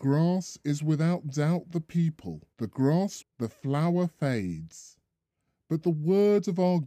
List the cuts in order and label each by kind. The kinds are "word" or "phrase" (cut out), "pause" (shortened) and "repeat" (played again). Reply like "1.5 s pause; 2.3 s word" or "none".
2.5 s pause; 3.2 s word

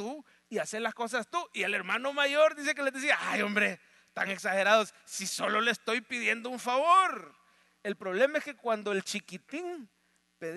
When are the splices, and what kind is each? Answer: none

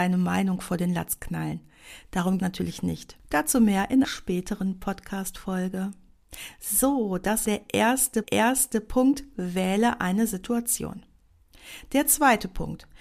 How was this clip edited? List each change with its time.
2.4 s word; 4.0 s word; 7.5 s word; 8.2 s repeat

